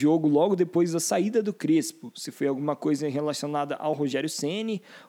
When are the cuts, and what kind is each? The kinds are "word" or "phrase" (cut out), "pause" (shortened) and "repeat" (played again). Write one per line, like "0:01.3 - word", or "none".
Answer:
none